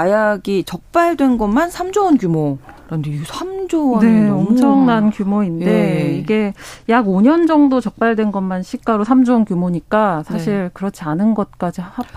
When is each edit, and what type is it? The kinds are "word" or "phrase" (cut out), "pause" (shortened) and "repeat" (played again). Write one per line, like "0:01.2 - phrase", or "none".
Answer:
0:02.8 - pause